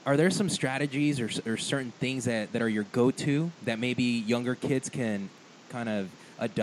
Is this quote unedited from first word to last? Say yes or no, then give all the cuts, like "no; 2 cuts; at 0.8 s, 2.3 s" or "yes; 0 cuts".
yes; 0 cuts